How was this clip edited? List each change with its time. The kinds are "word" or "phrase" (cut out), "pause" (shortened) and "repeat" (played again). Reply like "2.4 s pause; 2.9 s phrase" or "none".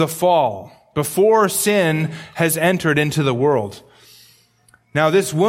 none